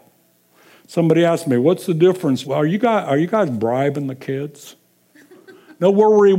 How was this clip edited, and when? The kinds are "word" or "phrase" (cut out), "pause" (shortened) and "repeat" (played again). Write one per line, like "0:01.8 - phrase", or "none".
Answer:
0:02.4 - word